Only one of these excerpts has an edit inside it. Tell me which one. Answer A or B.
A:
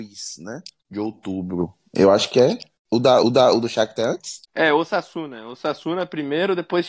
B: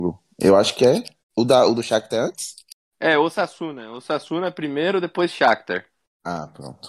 A